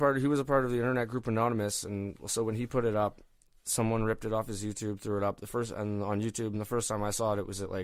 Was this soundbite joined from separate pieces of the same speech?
no; 0 cuts

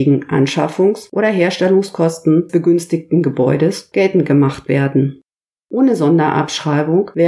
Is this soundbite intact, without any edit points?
no; 2 cuts; at 2.5 s, 3.9 s

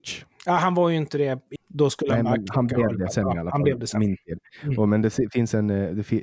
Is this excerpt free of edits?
no; 1 cut; at 1.6 s

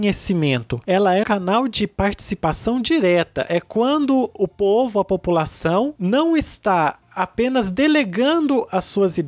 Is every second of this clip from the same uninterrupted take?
no; 1 cut; at 1.2 s

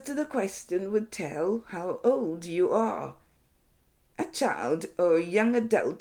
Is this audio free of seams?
yes; 0 cuts

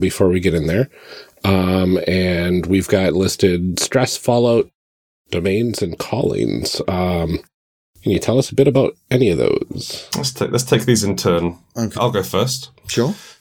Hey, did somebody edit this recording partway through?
yes; 1 cut; at 11.9 s

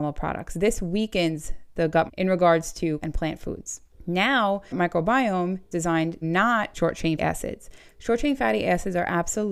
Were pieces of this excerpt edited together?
yes; 7 cuts; at 2.1 s, 3.0 s, 4.7 s, 5.7 s, 6.2 s, 6.7 s, 7.2 s

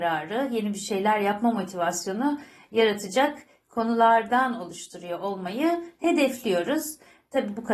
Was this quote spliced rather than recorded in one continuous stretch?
no; 0 cuts

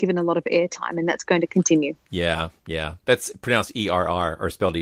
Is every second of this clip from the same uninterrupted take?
no; 2 cuts; at 2.0 s, 3.0 s

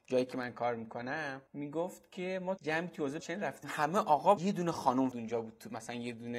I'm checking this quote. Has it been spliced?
yes; 6 cuts; at 1.5 s, 2.6 s, 3.2 s, 3.6 s, 4.4 s, 5.1 s

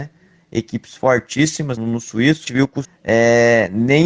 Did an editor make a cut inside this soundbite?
yes; 3 cuts; at 1.8 s, 2.5 s, 2.8 s

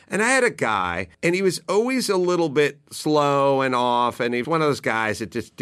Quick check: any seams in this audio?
yes; 2 cuts; at 1.1 s, 4.4 s

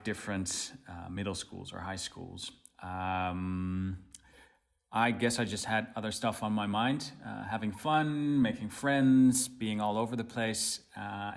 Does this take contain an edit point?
no; 0 cuts

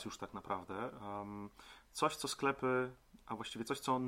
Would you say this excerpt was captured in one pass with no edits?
yes; 0 cuts

